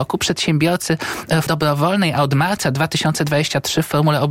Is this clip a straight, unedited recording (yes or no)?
no